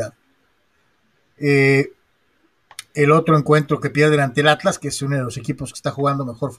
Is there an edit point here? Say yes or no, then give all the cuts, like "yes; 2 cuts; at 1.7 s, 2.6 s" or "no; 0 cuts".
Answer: no; 0 cuts